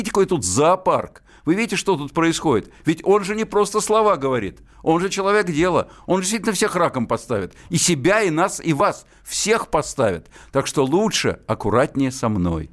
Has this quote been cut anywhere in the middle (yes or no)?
no